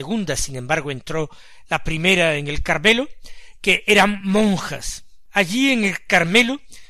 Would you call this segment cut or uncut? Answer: uncut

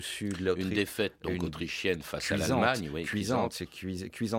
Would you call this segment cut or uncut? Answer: uncut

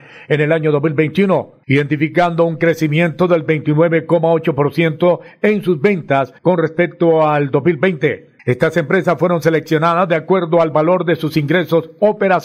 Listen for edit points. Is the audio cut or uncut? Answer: cut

